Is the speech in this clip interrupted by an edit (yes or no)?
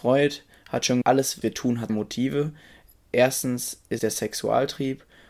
yes